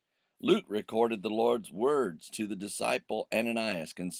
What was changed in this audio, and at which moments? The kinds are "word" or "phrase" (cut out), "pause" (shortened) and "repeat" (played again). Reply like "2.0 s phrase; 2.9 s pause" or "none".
none